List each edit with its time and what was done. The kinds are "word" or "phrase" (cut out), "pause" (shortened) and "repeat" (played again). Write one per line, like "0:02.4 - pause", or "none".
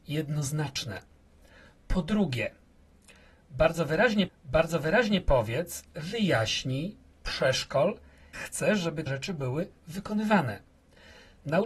0:04.3 - repeat
0:07.1 - word
0:08.3 - word
0:09.1 - word